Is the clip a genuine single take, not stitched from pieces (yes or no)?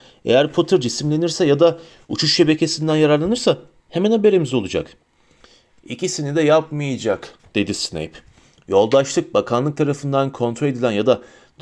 yes